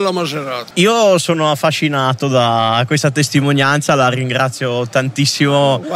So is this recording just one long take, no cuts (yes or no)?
yes